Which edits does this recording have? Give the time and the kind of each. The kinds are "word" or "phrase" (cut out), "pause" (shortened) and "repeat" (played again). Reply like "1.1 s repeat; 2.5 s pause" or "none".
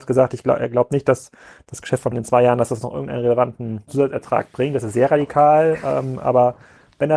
2.1 s word; 3.9 s word

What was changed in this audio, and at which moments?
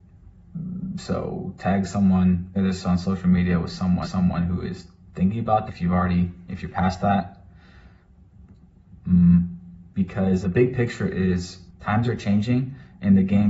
2.6 s word; 4.0 s repeat; 5.7 s word; 10.4 s word; 11.7 s pause

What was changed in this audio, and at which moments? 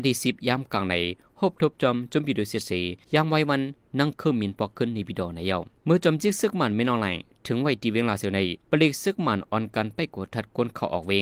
3.0 s pause; 5.8 s pause; 8.6 s pause

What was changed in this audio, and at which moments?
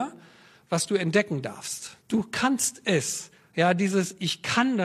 2.0 s pause

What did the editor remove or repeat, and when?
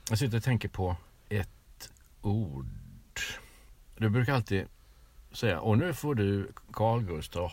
none

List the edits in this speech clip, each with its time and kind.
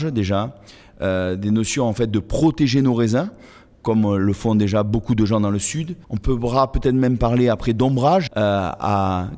6.0 s pause; 8.3 s word

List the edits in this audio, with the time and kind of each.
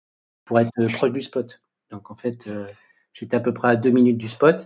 none

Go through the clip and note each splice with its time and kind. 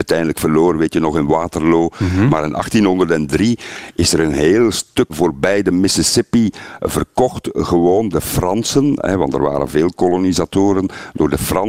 5.1 s word; 8.1 s word

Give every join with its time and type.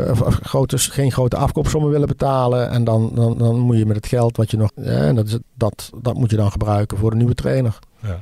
0.9 s phrase; 3.3 s repeat; 4.7 s word; 5.4 s phrase

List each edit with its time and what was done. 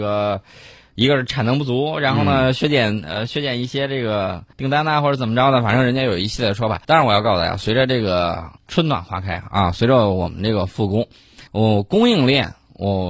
4.5 s pause; 6.8 s pause; 8.6 s pause; 11.5 s pause

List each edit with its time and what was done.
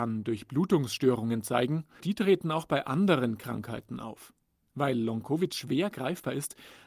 2.0 s word

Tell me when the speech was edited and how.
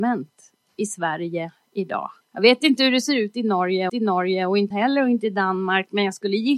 2.2 s pause; 3.9 s repeat; 4.7 s phrase

